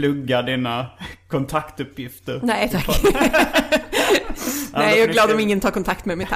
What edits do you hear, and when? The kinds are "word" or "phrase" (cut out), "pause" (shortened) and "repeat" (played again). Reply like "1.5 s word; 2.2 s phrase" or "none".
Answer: none